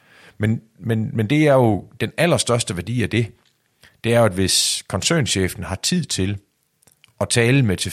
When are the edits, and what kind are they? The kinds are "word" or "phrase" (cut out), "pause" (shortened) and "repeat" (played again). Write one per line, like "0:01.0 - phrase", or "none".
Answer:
none